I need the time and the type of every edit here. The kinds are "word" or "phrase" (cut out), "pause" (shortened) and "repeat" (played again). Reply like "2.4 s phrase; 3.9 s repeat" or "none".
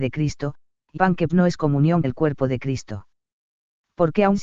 1.0 s word; 1.3 s word; 2.0 s word